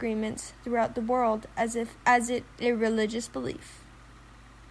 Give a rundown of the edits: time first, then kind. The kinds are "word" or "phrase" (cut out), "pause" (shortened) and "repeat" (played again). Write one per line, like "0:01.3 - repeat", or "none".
0:02.0 - pause
0:02.5 - word

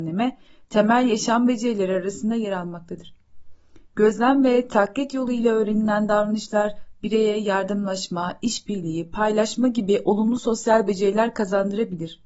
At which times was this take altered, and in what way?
none

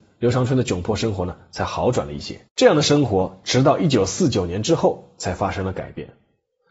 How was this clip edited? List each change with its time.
0:02.5 - pause

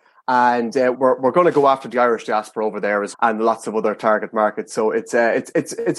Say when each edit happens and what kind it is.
0:00.9 - word
0:03.1 - word

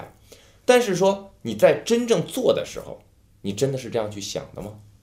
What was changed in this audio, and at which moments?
none

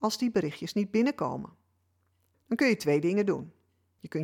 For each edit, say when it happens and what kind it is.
none

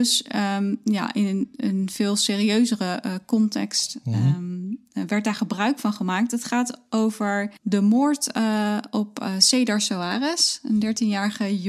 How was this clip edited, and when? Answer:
0:07.6 - pause

